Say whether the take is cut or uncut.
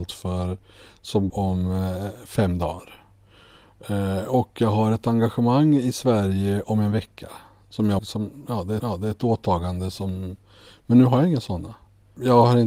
cut